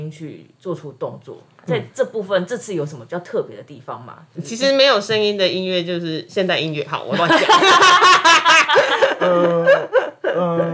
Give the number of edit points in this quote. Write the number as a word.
zero